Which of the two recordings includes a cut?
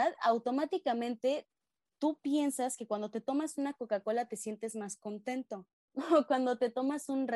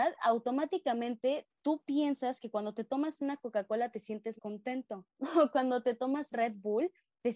second; 4 cuts; at 1.6 s, 4.4 s, 5.1 s, 6.3 s

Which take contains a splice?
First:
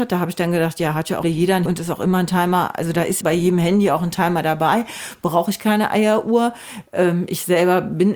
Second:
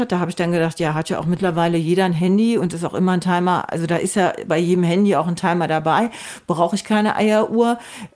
first; 3 cuts; at 1.2 s, 1.7 s, 3.2 s

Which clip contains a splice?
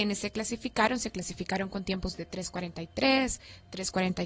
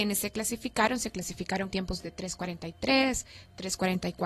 second; 1 cut; at 1.7 s

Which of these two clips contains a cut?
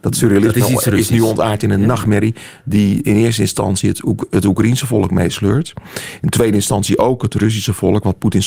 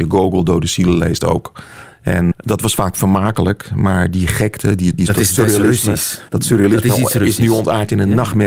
second; 3 cuts; at 2.3 s, 5.0 s, 6.3 s

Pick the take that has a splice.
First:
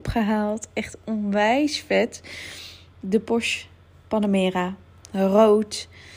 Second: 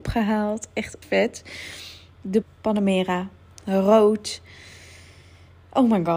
second; 2 cuts; at 1.0 s, 2.4 s

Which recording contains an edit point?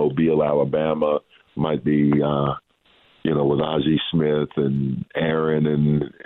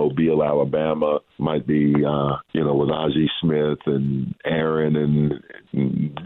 second; 2 cuts; at 1.3 s, 2.5 s

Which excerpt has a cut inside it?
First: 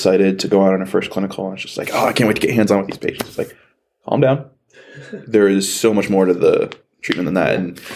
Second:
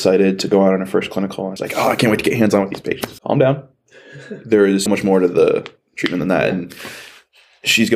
second; 3 cuts; at 1.6 s, 3.2 s, 4.9 s

